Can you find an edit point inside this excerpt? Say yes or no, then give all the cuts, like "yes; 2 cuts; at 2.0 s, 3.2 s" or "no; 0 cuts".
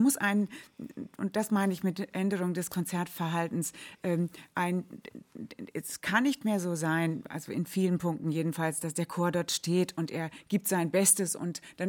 no; 0 cuts